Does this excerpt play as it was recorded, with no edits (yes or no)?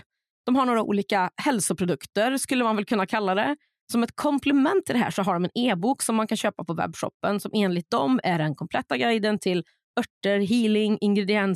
yes